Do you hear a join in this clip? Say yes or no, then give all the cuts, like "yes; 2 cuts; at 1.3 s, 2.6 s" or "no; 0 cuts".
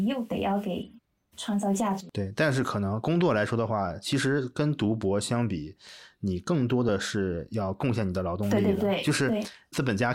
no; 0 cuts